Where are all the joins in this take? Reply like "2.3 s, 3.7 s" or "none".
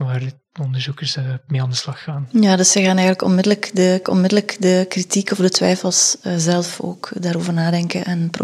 4.0 s